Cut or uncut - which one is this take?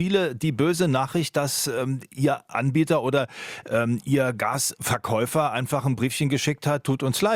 uncut